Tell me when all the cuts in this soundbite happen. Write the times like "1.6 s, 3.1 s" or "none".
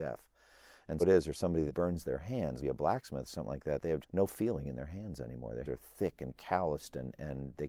1.0 s, 1.7 s, 2.6 s, 4.0 s, 5.6 s